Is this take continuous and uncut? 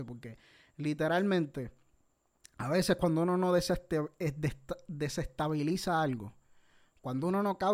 yes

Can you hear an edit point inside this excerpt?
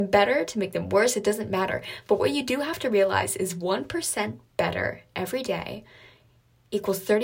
no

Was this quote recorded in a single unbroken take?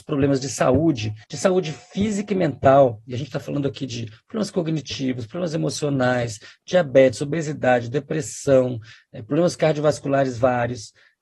no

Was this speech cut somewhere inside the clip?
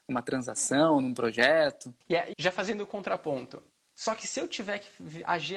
yes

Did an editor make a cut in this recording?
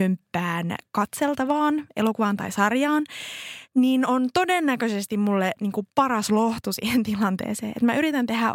yes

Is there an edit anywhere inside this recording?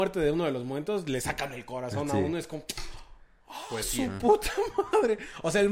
no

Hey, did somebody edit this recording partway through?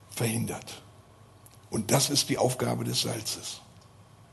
no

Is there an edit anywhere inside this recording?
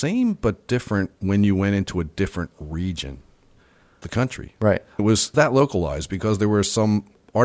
yes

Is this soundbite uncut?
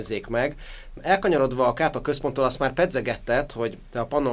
yes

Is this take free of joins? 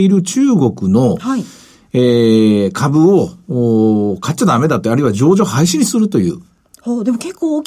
yes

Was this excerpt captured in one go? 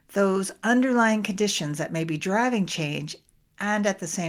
yes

